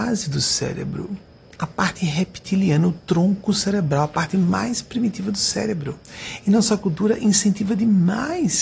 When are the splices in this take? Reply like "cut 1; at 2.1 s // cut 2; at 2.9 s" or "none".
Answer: none